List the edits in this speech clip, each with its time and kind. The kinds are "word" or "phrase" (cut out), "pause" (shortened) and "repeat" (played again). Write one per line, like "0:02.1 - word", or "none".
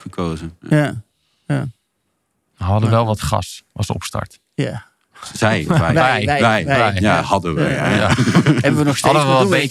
none